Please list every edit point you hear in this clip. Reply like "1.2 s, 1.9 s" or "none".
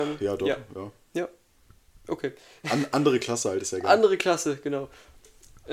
none